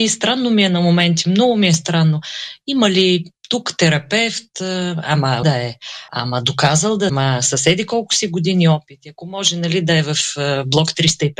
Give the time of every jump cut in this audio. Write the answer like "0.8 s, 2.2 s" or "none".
5.4 s, 6.1 s, 7.1 s